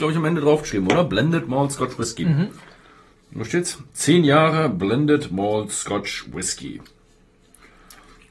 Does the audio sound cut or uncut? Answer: uncut